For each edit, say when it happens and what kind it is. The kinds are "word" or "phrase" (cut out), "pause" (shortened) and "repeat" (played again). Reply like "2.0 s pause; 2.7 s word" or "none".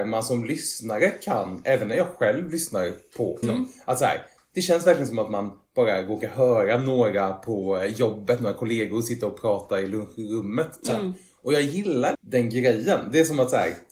3.4 s phrase; 12.1 s word